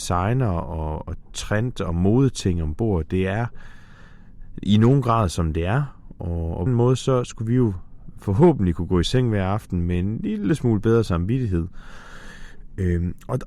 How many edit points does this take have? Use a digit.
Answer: 1